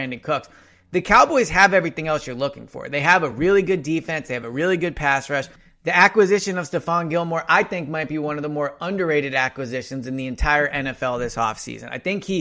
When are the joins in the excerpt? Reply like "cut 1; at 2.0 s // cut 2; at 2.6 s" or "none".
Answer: none

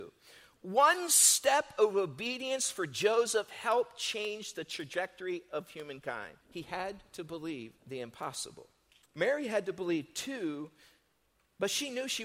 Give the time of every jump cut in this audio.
cut 1; at 6.4 s // cut 2; at 7.8 s // cut 3; at 9.0 s

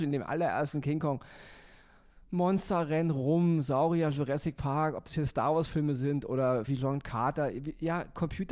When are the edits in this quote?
cut 1; at 6.7 s

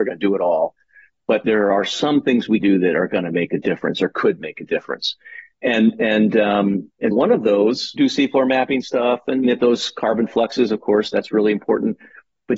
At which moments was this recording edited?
cut 1; at 2.6 s // cut 2; at 7.1 s // cut 3; at 8.0 s // cut 4; at 9.4 s

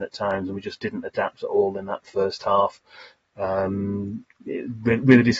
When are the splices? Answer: none

